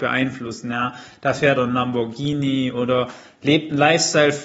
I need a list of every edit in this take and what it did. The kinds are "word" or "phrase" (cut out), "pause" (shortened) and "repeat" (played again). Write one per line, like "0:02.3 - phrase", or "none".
0:01.6 - phrase